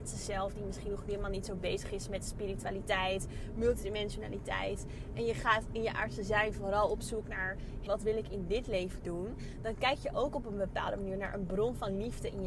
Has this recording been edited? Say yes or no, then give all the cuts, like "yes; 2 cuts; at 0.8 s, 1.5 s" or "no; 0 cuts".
yes; 1 cut; at 7.9 s